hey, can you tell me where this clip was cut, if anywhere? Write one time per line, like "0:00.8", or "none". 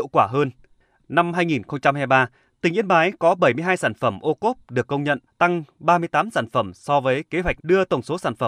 0:05.3
0:07.6

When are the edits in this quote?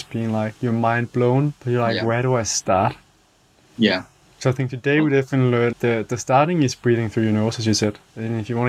0:01.6
0:05.7

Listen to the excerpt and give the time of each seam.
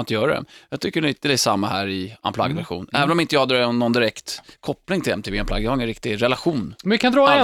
0:04.5

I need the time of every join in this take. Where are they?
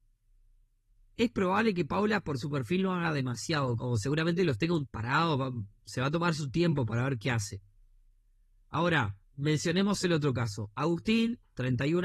0:03.8
0:04.9
0:09.2

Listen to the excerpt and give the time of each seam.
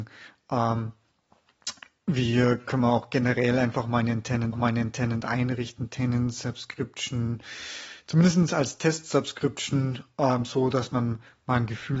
0:04.5

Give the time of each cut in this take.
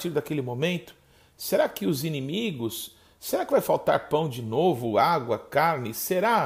none

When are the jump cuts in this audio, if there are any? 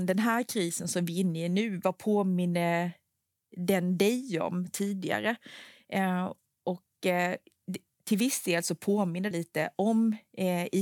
0:09.3

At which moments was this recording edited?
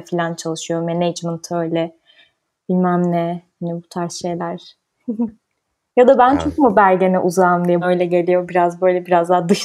0:07.8

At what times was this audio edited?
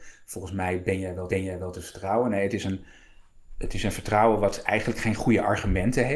0:01.3

